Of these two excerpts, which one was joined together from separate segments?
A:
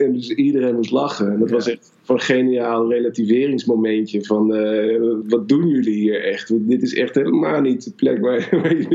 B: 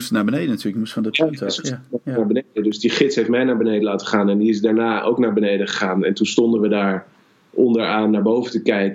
A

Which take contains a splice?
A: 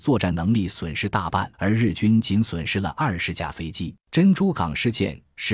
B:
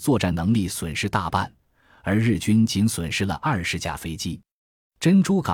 A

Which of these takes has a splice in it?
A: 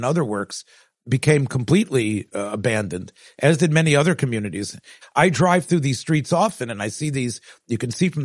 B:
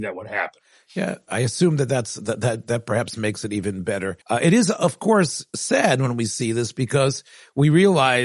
B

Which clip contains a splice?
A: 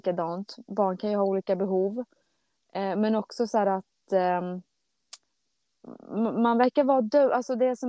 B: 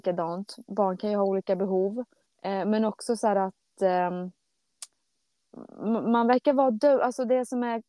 B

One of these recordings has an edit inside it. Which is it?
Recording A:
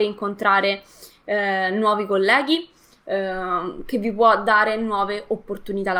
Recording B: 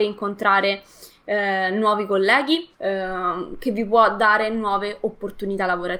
B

